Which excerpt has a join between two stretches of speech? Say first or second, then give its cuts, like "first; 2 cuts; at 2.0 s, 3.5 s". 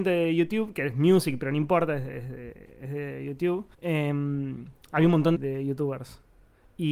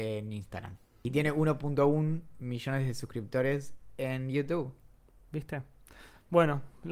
first; 2 cuts; at 3.7 s, 5.3 s